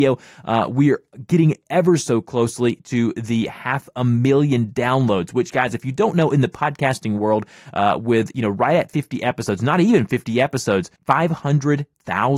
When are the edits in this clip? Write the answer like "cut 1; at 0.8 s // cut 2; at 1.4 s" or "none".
cut 1; at 11.0 s